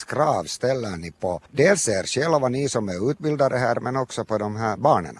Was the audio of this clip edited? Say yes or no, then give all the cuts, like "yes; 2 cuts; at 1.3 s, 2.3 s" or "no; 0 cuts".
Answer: yes; 1 cut; at 1.5 s